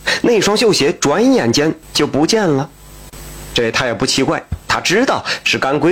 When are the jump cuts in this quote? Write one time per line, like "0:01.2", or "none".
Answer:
0:01.8